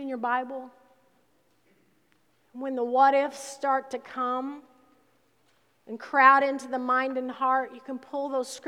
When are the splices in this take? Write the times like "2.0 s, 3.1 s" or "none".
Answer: none

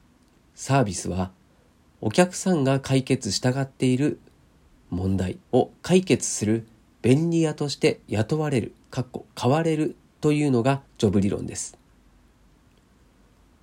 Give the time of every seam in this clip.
5.4 s, 8.8 s, 10.9 s

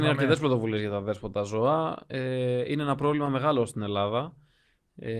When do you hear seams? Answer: none

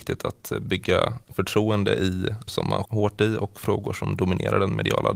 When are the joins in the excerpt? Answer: 2.5 s, 2.8 s

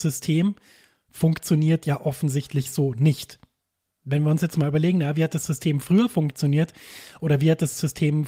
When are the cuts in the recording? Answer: none

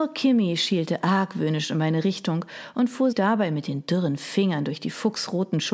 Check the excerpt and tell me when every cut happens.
3.1 s

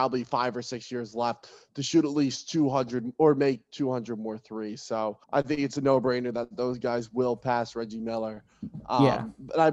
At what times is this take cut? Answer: 5.2 s

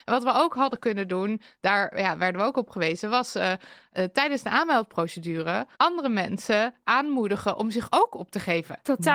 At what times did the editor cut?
5.7 s

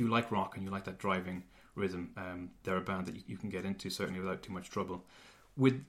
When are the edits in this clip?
none

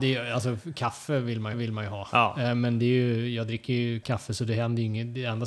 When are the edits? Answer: 1.5 s, 4.0 s

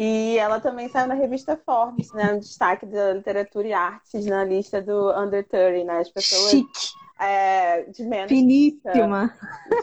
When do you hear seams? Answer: 7.1 s

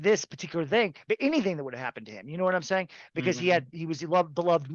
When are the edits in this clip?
none

